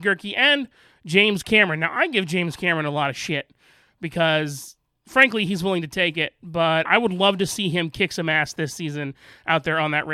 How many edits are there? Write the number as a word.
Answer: one